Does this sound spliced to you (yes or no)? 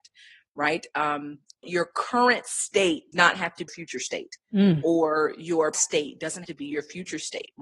yes